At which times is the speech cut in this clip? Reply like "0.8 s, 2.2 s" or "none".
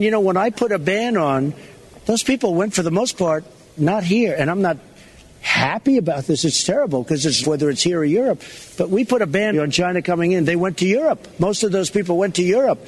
7.4 s, 9.5 s